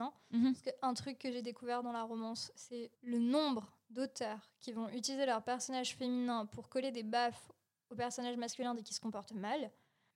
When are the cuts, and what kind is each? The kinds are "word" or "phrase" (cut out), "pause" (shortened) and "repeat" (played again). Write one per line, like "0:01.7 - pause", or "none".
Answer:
0:02.9 - pause